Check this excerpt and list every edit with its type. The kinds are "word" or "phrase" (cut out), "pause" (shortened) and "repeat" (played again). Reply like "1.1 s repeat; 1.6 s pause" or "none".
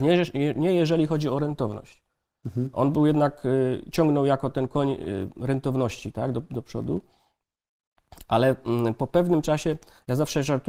none